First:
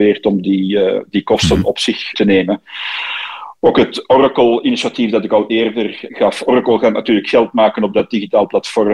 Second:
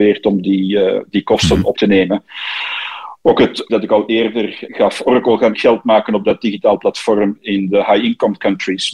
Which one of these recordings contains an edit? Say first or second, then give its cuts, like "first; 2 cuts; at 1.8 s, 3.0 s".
second; 3 cuts; at 1.7 s, 3.7 s, 5.5 s